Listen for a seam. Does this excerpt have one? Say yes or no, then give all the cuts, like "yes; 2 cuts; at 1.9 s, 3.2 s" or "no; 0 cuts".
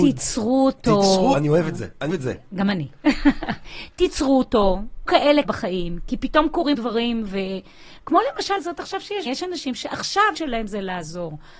yes; 9 cuts; at 1.3 s, 2.1 s, 5.1 s, 5.4 s, 6.7 s, 8.6 s, 9.3 s, 9.7 s, 10.3 s